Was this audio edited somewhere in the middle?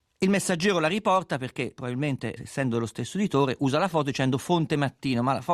yes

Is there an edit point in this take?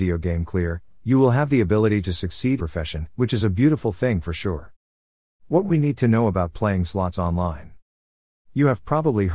yes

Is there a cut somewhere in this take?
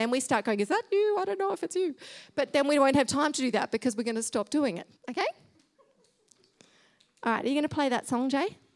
yes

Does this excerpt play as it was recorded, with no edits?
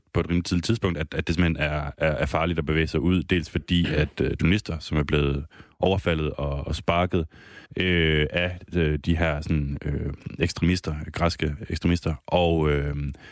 no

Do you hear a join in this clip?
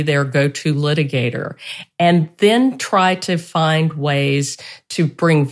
no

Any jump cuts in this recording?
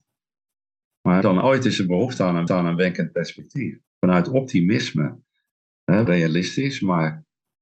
yes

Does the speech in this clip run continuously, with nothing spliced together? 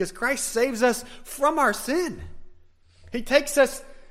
yes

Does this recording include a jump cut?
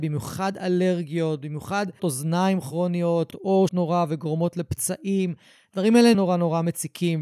yes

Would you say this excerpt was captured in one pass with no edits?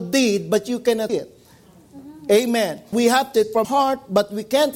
no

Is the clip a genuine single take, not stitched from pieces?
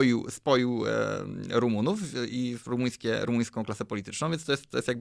yes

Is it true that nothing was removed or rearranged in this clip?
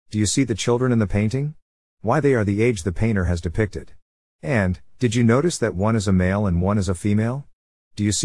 yes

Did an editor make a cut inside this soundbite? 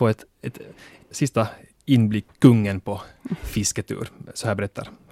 yes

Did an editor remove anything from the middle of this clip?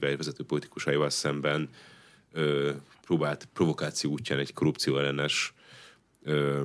no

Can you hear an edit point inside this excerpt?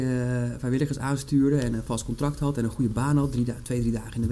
no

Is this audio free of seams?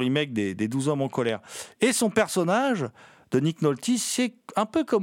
yes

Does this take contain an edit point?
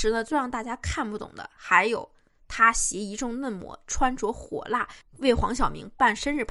no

